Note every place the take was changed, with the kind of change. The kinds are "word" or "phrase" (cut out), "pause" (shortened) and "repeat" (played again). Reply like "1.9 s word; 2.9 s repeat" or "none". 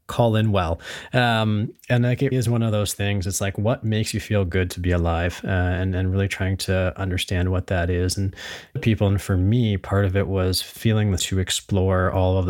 2.3 s word; 8.8 s phrase; 11.2 s phrase